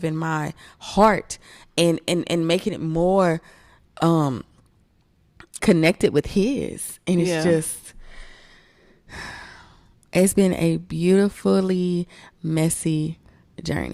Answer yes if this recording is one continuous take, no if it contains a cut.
no